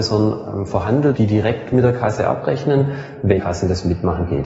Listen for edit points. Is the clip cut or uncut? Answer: cut